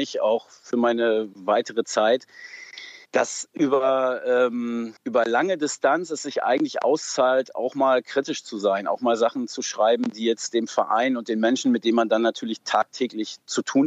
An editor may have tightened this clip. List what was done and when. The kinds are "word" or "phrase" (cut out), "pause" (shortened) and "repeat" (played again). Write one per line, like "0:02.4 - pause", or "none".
0:03.1 - pause
0:05.0 - pause